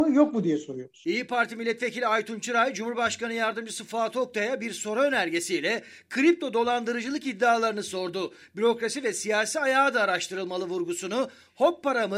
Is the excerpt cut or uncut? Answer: uncut